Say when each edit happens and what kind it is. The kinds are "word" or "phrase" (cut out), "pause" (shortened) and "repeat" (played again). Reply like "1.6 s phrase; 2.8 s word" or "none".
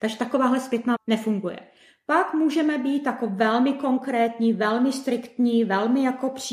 1.0 s word